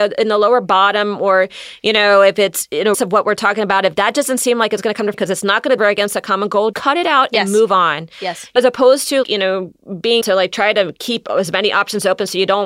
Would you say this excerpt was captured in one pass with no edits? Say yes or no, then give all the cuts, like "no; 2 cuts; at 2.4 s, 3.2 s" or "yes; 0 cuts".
no; 7 cuts; at 2.9 s, 5.1 s, 5.8 s, 6.7 s, 8.6 s, 9.2 s, 10.2 s